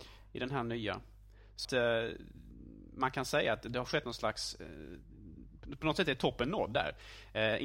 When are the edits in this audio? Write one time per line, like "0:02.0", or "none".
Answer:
0:01.6